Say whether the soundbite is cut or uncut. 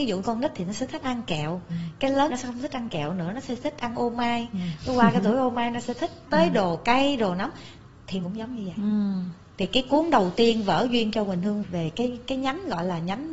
cut